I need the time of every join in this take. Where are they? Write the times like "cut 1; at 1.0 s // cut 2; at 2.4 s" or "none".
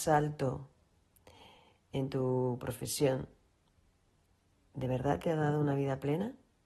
none